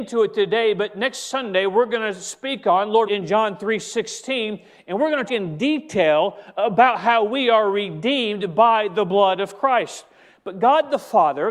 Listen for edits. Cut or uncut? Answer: cut